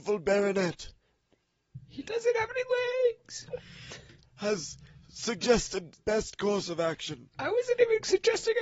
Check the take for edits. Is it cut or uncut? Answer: cut